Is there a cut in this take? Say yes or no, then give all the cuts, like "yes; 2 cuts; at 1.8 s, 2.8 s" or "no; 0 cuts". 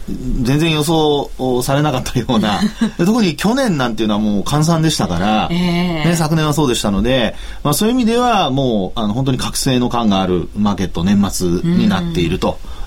yes; 1 cut; at 3.0 s